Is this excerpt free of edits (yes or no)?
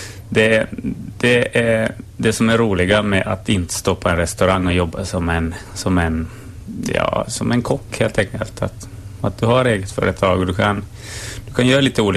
yes